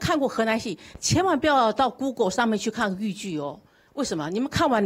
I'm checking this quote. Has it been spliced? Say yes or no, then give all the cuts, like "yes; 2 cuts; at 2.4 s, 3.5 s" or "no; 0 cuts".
no; 0 cuts